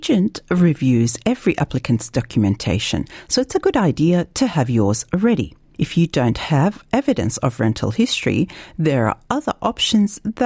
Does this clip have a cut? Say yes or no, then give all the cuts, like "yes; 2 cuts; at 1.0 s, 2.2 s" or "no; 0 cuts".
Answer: no; 0 cuts